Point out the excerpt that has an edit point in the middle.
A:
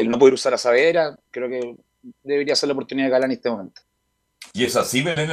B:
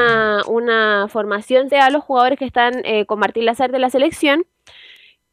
B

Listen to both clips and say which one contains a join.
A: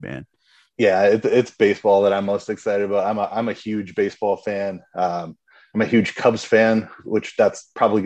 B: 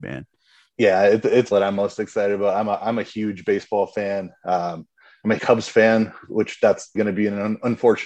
B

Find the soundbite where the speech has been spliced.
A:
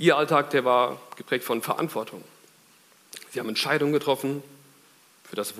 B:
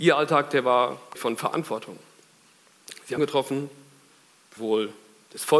B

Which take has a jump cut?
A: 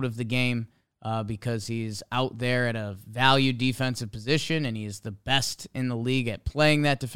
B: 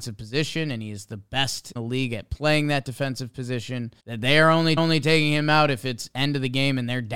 B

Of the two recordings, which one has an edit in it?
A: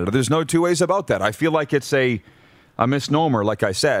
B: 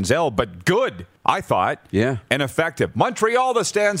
B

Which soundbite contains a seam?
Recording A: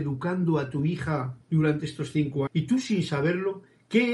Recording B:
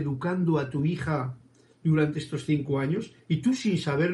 A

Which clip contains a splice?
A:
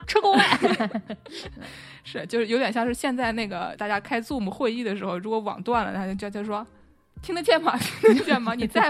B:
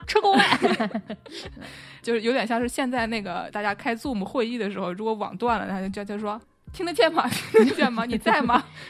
B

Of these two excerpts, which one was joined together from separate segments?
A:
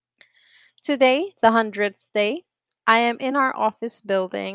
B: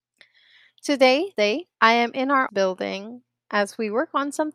B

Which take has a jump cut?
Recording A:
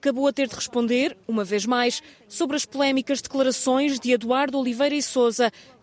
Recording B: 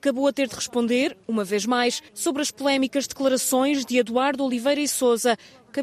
B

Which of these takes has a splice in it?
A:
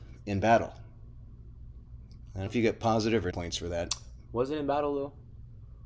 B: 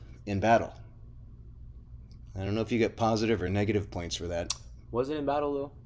A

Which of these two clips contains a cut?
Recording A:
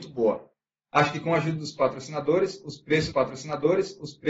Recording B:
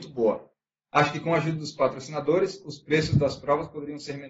A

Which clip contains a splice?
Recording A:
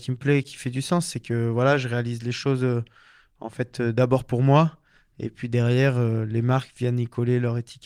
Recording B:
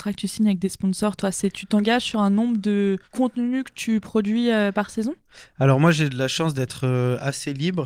B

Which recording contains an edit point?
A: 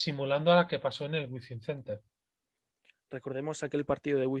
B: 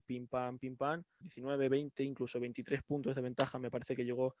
B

